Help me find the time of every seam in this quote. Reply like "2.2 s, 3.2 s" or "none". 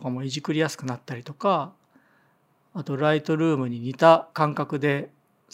4.3 s